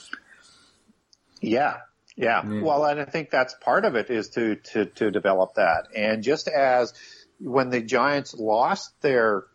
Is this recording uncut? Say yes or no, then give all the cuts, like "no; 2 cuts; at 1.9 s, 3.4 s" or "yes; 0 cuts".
yes; 0 cuts